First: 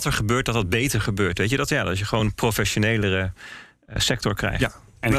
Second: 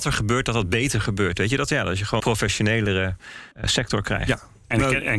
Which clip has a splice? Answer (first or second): second